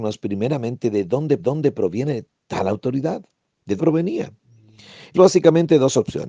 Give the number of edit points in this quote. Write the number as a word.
three